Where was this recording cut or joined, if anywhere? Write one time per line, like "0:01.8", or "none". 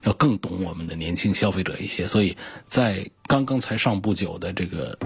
0:03.2